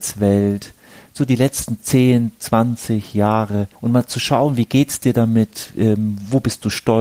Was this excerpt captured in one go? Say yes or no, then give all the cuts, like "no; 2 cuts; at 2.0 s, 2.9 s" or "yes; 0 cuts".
no; 1 cut; at 3.8 s